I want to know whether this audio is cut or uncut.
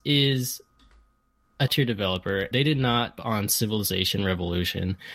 cut